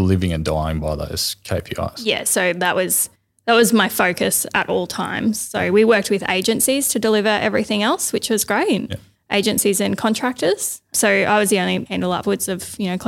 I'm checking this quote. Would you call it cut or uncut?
uncut